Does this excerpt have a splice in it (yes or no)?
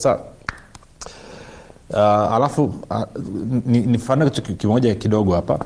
no